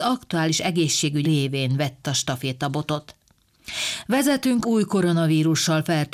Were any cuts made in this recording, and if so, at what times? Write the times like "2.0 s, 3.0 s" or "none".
1.2 s, 2.0 s, 4.6 s